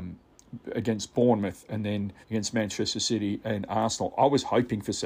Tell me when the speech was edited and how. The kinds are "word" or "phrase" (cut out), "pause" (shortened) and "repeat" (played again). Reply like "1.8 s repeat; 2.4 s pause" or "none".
2.2 s pause

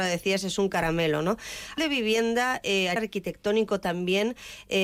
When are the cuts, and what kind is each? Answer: 1.8 s word; 3.0 s word

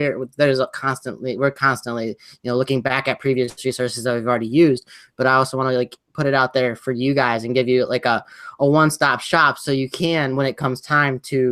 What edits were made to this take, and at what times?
none

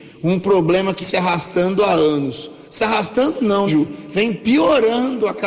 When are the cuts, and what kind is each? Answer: 1.0 s word; 2.6 s pause; 3.7 s word

